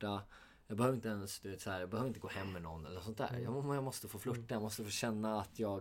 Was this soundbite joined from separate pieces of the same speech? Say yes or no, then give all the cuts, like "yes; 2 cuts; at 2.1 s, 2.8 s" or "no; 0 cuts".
no; 0 cuts